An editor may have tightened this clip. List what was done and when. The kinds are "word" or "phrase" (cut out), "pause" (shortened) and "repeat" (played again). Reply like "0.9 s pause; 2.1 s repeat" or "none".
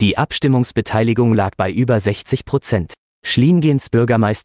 none